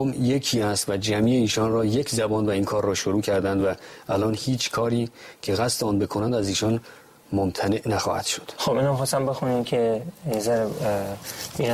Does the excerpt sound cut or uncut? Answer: uncut